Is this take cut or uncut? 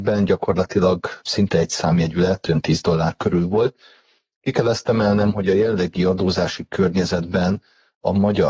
uncut